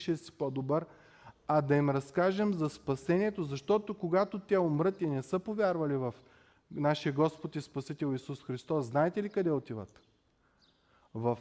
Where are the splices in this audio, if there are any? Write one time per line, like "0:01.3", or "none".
none